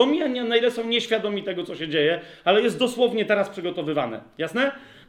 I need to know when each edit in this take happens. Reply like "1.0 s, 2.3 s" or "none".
none